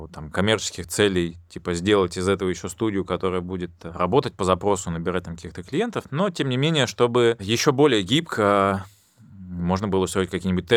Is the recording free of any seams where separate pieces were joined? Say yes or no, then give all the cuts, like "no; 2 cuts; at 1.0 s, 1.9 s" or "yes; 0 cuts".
yes; 0 cuts